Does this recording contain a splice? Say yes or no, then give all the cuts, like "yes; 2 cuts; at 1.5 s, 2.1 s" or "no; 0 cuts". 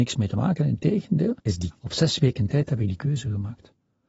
yes; 2 cuts; at 1.4 s, 1.7 s